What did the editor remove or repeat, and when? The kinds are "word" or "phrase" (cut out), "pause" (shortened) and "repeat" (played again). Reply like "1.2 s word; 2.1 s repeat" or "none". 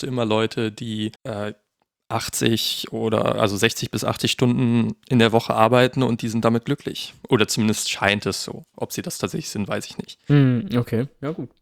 1.1 s pause